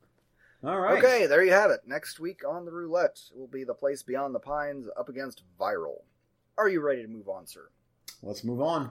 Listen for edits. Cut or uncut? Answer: cut